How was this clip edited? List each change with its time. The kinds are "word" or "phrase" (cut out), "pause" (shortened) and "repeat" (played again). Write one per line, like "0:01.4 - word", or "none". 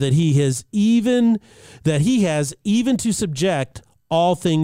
none